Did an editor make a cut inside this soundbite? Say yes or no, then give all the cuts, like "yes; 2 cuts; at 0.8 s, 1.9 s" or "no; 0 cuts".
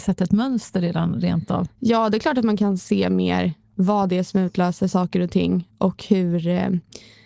no; 0 cuts